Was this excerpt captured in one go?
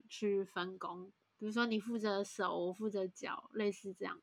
yes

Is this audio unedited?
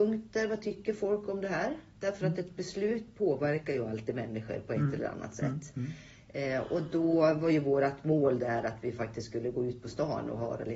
yes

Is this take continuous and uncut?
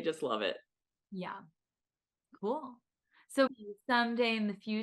no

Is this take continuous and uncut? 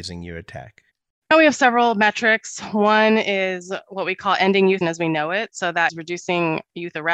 no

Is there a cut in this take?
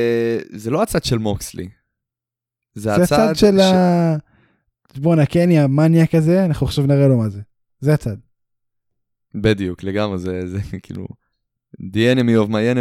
no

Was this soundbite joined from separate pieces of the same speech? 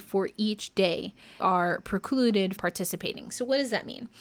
yes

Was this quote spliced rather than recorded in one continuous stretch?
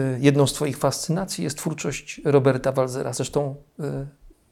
no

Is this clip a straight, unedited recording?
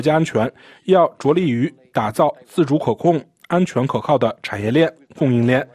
yes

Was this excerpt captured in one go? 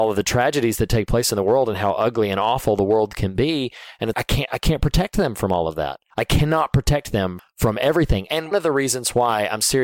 no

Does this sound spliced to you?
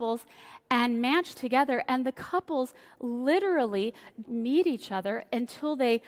yes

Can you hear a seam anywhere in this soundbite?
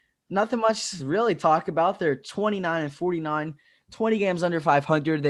no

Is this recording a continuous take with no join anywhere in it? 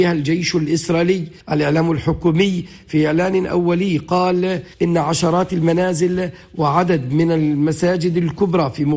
no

